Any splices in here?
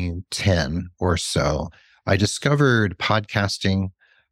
no; 0 cuts

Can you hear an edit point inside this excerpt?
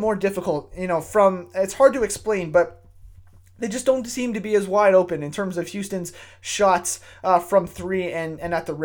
no; 0 cuts

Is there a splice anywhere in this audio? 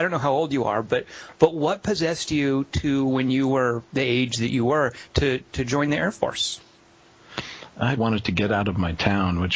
yes; 1 cut; at 8.0 s

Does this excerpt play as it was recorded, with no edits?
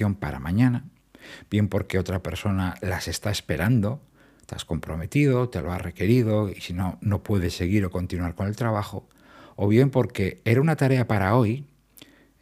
yes; 0 cuts

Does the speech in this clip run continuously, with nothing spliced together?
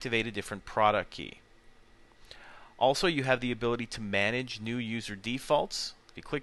yes; 0 cuts

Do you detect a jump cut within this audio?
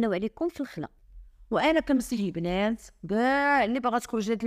no; 0 cuts

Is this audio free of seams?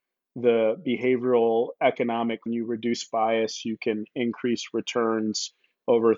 no; 1 cut; at 2.5 s

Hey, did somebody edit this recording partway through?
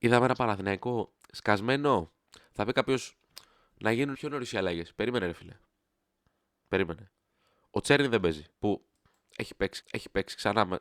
yes; 3 cuts; at 4.1 s, 8.5 s, 9.8 s

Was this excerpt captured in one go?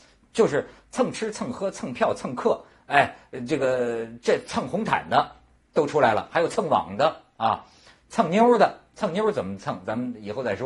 yes; 0 cuts

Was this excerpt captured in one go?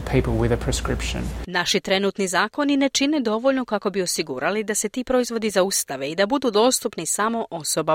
yes; 0 cuts

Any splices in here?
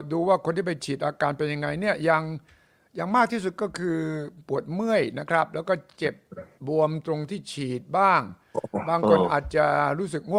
no; 0 cuts

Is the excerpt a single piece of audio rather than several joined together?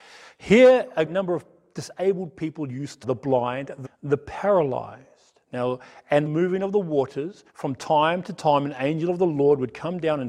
no; 6 cuts; at 1.0 s, 3.0 s, 3.8 s, 5.4 s, 6.3 s, 7.5 s

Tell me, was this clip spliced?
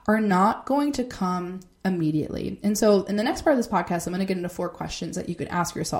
no; 0 cuts

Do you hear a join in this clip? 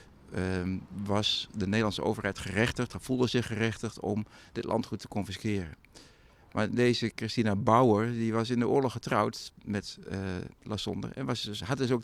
no; 0 cuts

